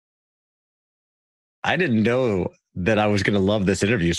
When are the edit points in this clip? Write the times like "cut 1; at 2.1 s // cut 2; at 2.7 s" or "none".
none